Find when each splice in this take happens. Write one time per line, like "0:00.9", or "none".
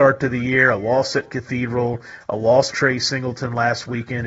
0:02.7